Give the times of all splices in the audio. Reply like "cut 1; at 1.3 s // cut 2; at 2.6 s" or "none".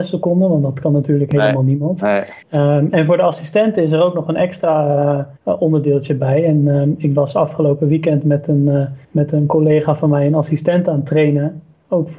cut 1; at 2.4 s // cut 2; at 5.4 s // cut 3; at 9.0 s